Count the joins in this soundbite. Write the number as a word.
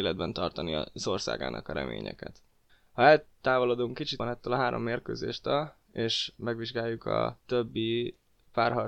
three